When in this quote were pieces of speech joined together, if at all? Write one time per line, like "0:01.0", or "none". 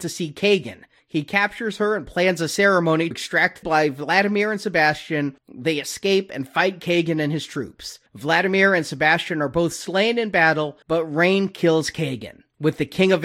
0:03.1
0:03.6
0:05.4
0:08.1
0:10.8